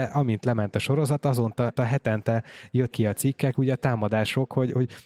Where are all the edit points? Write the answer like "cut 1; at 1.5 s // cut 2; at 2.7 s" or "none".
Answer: cut 1; at 1.8 s // cut 2; at 2.9 s